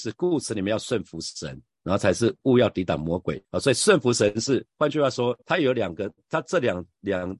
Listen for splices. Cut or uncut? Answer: cut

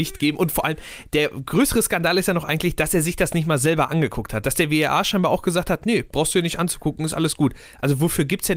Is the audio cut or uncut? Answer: uncut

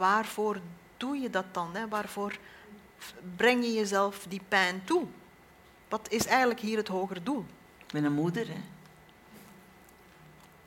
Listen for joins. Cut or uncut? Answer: uncut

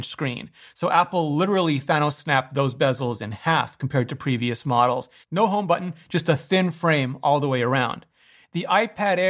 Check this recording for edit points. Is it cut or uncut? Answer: uncut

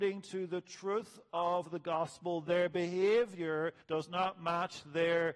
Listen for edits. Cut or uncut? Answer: cut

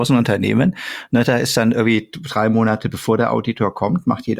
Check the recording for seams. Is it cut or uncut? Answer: uncut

